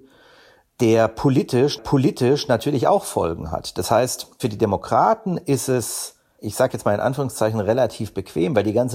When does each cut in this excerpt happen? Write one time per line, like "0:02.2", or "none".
0:01.8
0:06.4